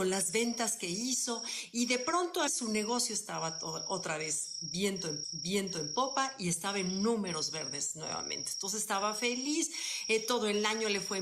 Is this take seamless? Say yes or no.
no